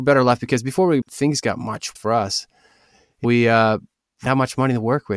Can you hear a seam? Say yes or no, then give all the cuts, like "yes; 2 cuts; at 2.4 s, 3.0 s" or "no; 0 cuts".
yes; 4 cuts; at 1.0 s, 2.0 s, 3.2 s, 4.3 s